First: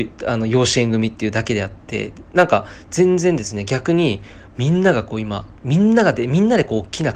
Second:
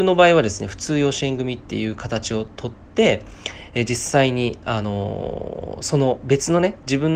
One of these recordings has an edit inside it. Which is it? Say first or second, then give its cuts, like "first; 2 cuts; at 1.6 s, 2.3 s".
first; 1 cut; at 5.6 s